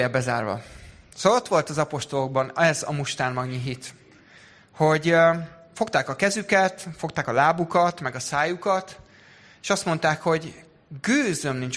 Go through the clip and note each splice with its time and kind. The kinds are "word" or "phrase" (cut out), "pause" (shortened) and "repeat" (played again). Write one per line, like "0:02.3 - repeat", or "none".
none